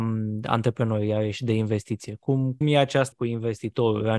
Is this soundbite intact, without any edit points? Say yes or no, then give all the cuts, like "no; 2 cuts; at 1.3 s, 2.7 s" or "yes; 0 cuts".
no; 2 cuts; at 2.6 s, 3.1 s